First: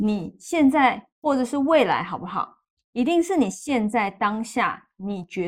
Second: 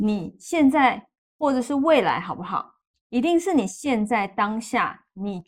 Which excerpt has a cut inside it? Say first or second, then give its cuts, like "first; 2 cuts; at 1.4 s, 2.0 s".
first; 1 cut; at 1.1 s